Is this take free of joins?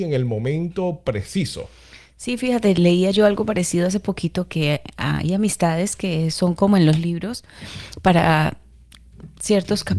yes; 0 cuts

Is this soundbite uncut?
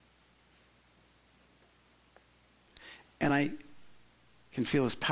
yes; 0 cuts

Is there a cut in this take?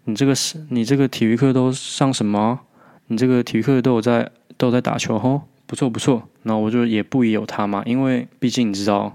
no; 0 cuts

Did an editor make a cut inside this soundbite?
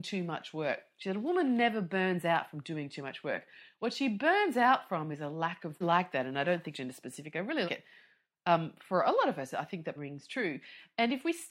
yes; 4 cuts; at 5.8 s, 6.7 s, 7.7 s, 10.0 s

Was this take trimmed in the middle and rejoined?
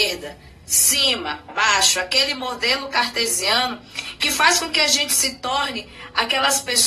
yes; 1 cut; at 1.5 s

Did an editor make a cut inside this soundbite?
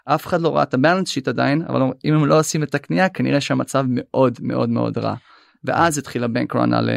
no; 0 cuts

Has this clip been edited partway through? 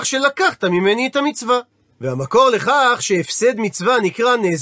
no; 0 cuts

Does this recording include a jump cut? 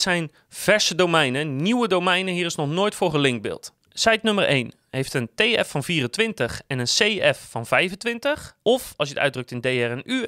yes; 2 cuts; at 3.8 s, 8.6 s

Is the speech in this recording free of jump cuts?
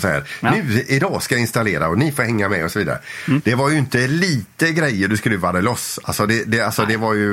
yes; 0 cuts

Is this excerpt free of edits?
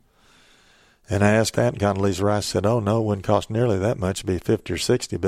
no; 1 cut; at 1.5 s

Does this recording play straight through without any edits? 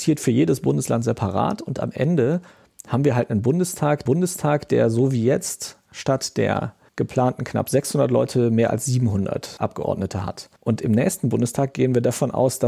no; 3 cuts; at 4.1 s, 6.9 s, 10.6 s

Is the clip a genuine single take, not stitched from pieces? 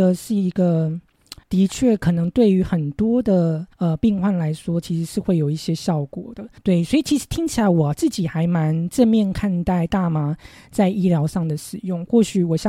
no; 3 cuts; at 1.4 s, 3.7 s, 6.6 s

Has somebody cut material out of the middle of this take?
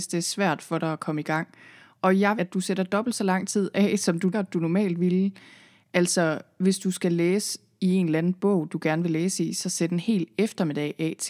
yes; 2 cuts; at 2.4 s, 4.3 s

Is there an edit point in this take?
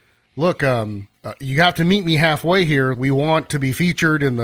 yes; 2 cuts; at 1.1 s, 2.9 s

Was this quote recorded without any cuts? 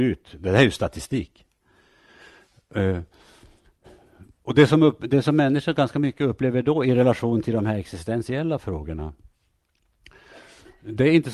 yes; 0 cuts

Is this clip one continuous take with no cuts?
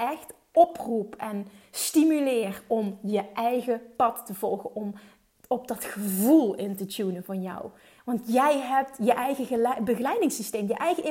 yes; 0 cuts

